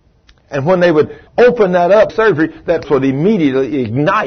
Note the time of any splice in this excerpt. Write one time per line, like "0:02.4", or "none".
0:01.3
0:02.1
0:02.8